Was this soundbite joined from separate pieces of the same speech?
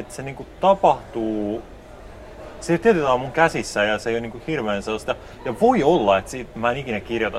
no; 0 cuts

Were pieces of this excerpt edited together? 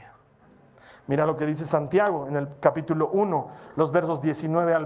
no; 0 cuts

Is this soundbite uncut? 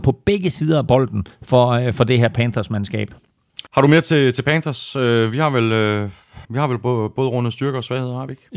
no; 2 cuts; at 3.7 s, 6.4 s

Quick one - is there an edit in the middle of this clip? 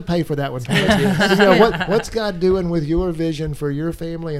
no; 0 cuts

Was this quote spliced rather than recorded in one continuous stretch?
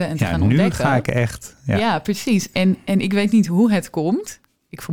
no; 0 cuts

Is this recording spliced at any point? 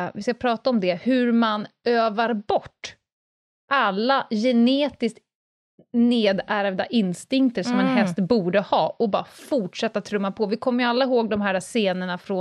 no; 0 cuts

